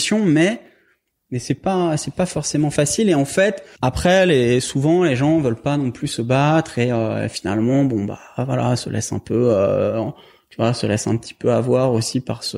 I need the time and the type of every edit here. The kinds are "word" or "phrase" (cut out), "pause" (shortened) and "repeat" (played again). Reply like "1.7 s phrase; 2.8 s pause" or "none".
none

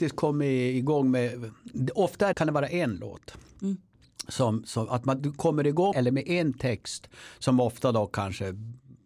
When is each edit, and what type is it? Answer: 2.3 s word; 5.9 s word

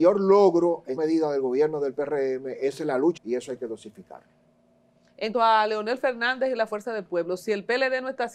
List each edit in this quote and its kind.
1.0 s word; 3.2 s word; 5.3 s word

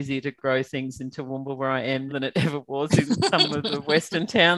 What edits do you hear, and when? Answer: 2.1 s word

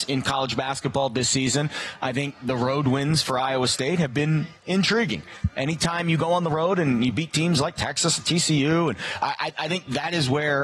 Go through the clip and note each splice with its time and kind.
4.6 s pause

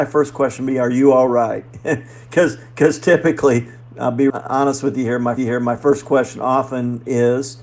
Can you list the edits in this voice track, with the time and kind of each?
4.3 s word; 5.4 s repeat

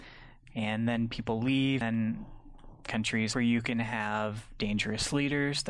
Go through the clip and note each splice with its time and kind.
1.8 s word; 3.3 s phrase

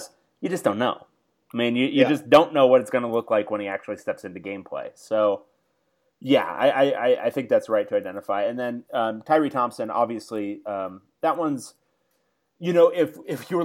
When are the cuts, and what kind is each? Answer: none

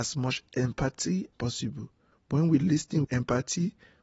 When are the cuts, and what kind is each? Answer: 1.3 s word; 3.0 s word

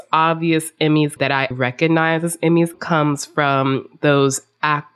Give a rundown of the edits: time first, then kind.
1.2 s word; 1.5 s word; 2.7 s word

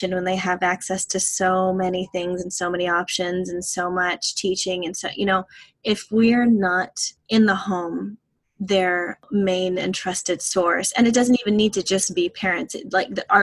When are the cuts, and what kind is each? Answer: none

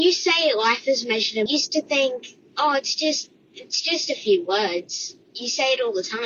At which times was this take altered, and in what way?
1.5 s phrase

